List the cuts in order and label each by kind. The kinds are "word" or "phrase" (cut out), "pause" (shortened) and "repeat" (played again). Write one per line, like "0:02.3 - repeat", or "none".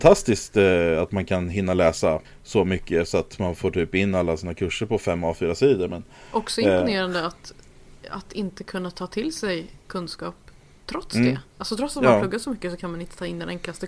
0:02.2 - pause